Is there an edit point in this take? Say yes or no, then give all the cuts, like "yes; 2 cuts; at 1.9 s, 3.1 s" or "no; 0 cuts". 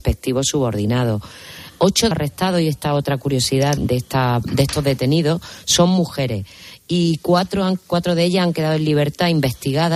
yes; 2 cuts; at 2.1 s, 3.8 s